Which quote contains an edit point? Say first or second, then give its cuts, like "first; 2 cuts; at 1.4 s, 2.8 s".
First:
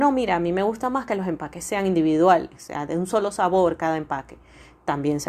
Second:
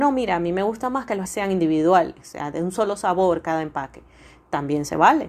second; 1 cut; at 1.2 s